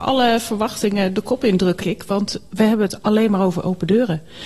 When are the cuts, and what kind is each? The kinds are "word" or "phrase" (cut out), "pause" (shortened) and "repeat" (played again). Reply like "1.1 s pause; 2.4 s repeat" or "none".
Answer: 1.8 s word